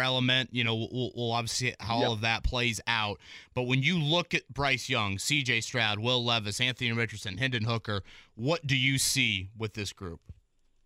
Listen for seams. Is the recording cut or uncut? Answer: uncut